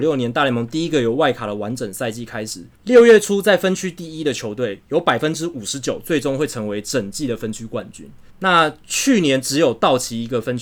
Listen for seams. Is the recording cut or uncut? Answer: cut